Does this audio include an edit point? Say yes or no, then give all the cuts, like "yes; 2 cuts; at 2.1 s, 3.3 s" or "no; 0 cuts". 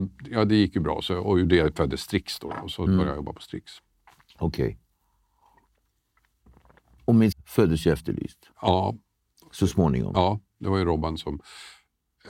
yes; 1 cut; at 7.3 s